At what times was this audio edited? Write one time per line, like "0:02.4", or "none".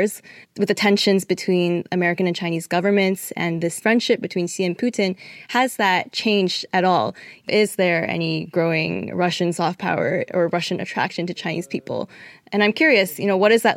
none